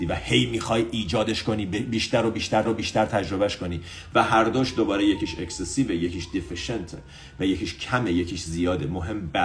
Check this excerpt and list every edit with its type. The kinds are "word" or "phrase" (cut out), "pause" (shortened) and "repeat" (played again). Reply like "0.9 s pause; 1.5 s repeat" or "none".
2.6 s repeat